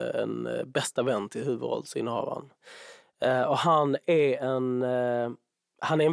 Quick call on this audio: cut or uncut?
uncut